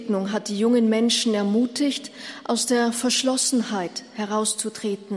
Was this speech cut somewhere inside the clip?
no; 0 cuts

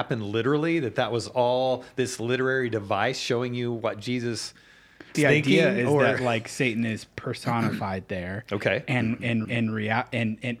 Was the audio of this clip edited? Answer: yes; 2 cuts; at 5.1 s, 9.4 s

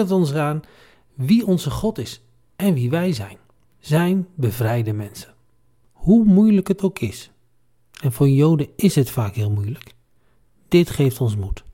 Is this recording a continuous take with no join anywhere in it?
yes; 0 cuts

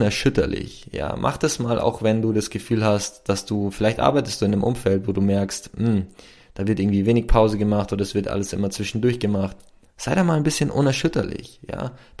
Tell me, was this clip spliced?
no; 0 cuts

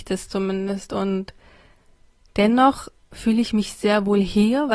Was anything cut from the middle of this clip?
no; 0 cuts

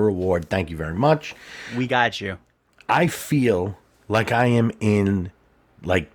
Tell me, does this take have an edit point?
no; 0 cuts

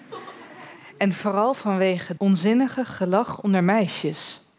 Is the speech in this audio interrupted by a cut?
yes; 1 cut; at 2.2 s

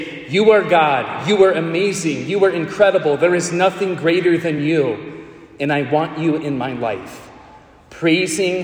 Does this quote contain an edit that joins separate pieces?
no; 0 cuts

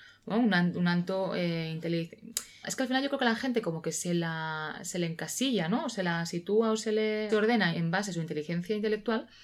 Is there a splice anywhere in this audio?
yes; 3 cuts; at 2.6 s, 7.3 s, 7.7 s

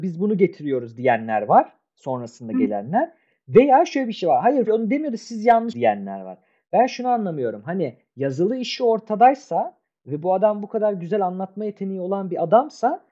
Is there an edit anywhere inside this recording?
yes; 2 cuts; at 4.7 s, 5.7 s

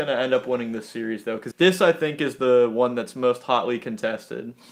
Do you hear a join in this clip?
yes; 1 cut; at 1.5 s

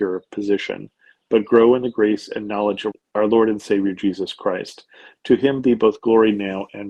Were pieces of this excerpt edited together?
no; 0 cuts

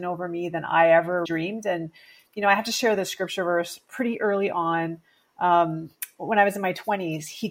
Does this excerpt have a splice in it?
yes; 1 cut; at 1.3 s

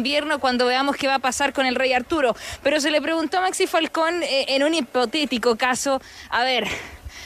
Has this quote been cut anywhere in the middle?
no; 0 cuts

